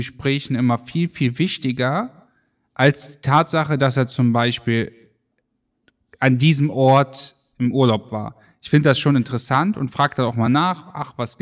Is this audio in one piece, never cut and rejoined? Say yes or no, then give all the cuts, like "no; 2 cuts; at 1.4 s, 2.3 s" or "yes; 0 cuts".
yes; 0 cuts